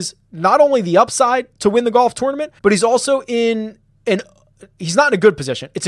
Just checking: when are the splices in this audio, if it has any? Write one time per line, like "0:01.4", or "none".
0:02.6
0:03.9